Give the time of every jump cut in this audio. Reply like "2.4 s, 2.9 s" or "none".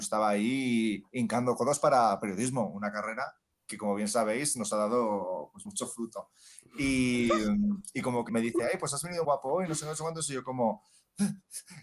5.7 s, 8.3 s, 9.2 s